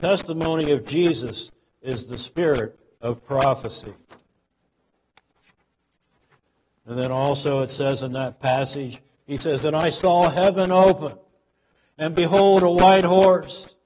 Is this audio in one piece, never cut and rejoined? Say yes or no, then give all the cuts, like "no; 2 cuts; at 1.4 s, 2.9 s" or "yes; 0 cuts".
yes; 0 cuts